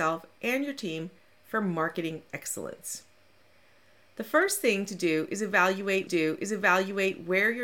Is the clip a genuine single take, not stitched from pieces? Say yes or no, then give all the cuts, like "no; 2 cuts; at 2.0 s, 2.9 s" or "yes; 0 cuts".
no; 1 cut; at 6.1 s